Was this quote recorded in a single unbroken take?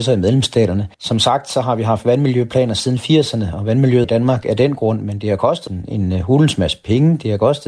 no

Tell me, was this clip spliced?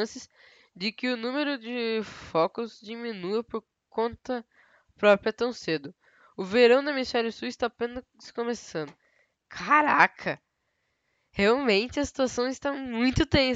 no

